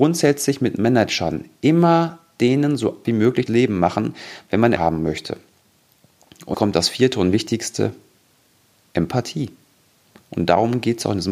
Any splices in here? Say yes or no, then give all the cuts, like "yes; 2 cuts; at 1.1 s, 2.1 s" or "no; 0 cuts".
yes; 4 cuts; at 3.0 s, 3.5 s, 4.8 s, 6.5 s